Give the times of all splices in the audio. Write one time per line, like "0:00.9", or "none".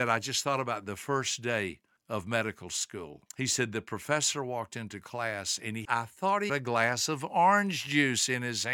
0:02.0
0:03.3
0:05.8
0:06.5

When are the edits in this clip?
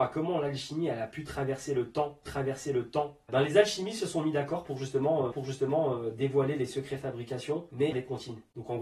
0:02.3
0:05.3
0:07.9

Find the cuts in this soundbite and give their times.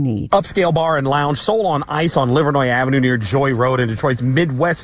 none

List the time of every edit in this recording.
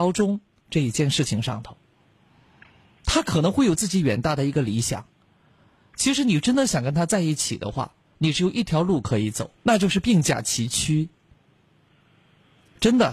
0:09.6

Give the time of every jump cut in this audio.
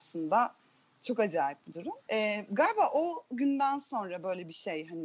0:02.0

